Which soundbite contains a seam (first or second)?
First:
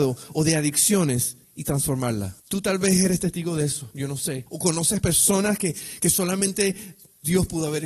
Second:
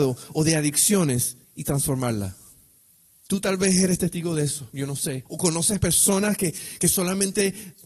first